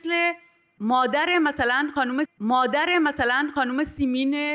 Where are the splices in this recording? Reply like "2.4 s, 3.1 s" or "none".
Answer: 2.2 s